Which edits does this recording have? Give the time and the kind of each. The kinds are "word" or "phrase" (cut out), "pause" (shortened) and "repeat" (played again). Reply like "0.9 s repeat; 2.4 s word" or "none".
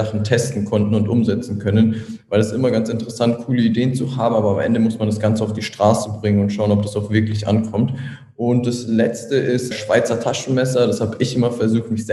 9.7 s word